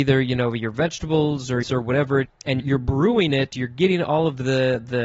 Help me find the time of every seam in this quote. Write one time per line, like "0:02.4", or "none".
0:01.6
0:02.2
0:02.6